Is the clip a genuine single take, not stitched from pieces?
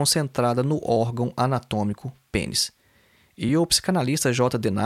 yes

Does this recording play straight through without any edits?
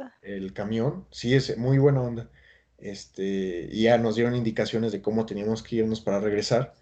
yes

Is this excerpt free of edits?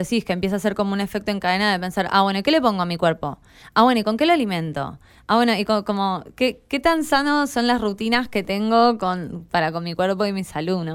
yes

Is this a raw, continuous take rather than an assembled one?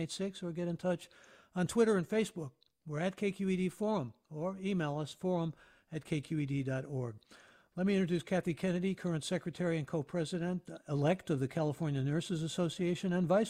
yes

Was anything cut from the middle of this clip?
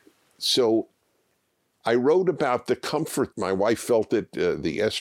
yes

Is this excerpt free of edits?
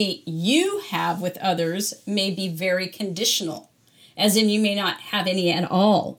yes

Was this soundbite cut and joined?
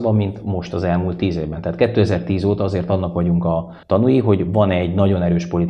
yes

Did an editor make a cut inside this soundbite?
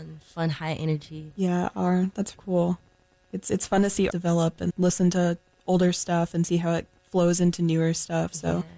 yes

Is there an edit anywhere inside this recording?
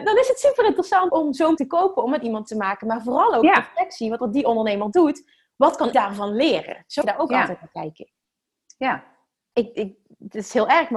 yes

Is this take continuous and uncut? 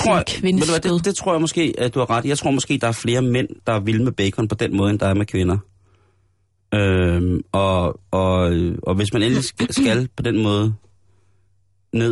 yes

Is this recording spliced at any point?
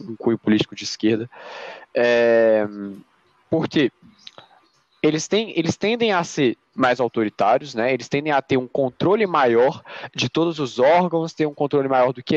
no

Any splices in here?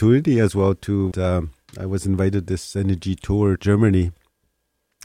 yes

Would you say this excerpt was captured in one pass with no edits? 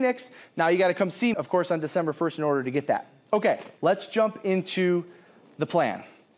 no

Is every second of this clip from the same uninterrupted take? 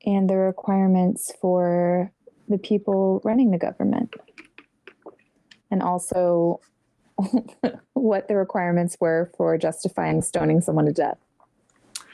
yes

